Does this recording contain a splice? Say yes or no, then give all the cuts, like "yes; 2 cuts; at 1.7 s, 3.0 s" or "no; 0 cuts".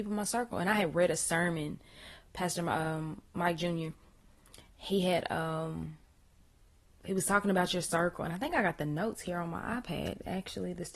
no; 0 cuts